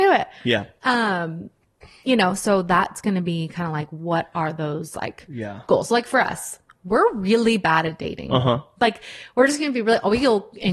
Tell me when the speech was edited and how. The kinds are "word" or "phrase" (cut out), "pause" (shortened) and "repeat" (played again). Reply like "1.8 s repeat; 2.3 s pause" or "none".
none